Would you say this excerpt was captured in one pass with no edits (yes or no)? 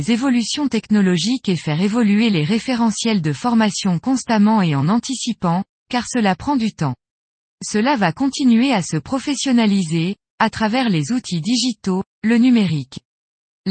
yes